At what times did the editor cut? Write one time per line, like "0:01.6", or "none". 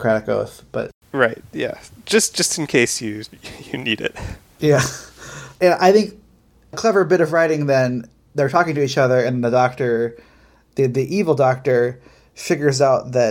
none